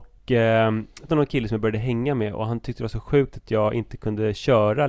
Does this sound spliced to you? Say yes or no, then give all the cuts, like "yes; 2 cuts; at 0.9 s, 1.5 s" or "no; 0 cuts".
yes; 1 cut; at 1.1 s